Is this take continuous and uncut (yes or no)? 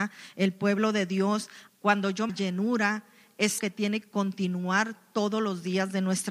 no